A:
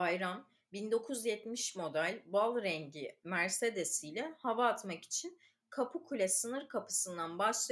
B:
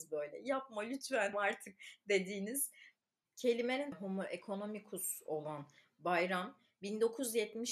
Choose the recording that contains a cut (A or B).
B